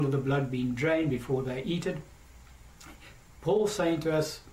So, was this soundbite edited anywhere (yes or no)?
no